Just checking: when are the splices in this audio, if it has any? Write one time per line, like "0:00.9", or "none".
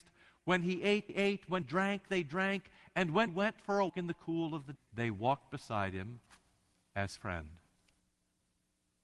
0:01.1
0:01.6
0:03.3
0:03.9
0:04.8
0:07.2